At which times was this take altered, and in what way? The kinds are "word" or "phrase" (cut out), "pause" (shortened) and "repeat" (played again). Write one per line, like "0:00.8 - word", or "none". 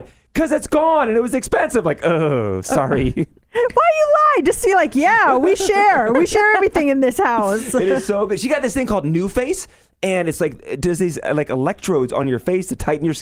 none